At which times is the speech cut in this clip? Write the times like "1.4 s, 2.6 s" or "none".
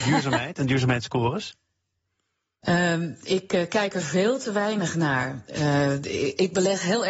none